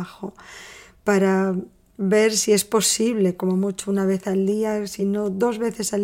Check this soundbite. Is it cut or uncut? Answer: uncut